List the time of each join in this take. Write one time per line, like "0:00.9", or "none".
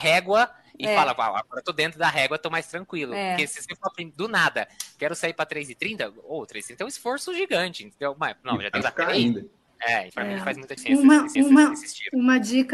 0:08.8
0:10.1
0:10.8
0:11.4